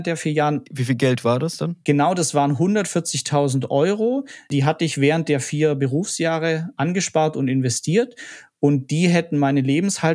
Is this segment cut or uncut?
uncut